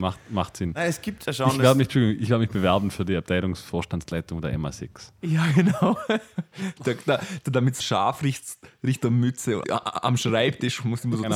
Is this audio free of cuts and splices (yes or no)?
no